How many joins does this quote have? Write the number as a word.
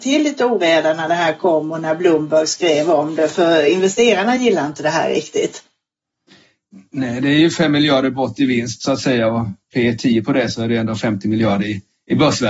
zero